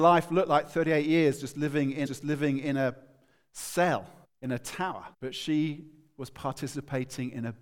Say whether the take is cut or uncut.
cut